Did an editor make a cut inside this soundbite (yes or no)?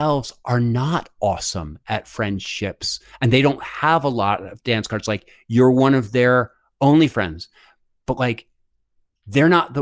no